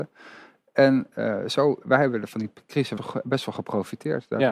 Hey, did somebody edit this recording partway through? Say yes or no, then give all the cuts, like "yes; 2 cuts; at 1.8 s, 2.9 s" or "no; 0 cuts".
yes; 1 cut; at 3.0 s